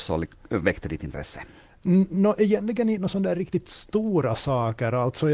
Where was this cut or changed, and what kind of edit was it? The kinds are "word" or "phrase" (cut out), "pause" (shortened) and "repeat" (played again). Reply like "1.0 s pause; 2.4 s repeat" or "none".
none